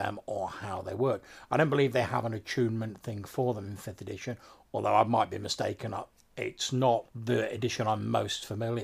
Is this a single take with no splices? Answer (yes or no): no